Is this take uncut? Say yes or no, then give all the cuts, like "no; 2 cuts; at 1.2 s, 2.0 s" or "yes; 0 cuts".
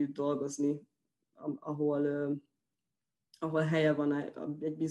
yes; 0 cuts